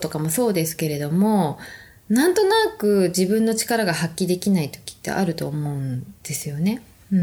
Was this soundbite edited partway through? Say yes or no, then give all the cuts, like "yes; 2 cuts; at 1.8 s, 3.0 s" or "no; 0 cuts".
no; 0 cuts